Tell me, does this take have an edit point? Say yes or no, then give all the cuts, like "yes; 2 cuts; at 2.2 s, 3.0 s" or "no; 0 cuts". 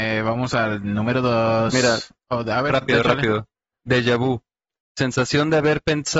no; 0 cuts